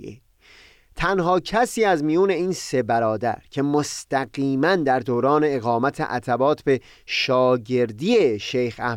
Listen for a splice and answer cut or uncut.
uncut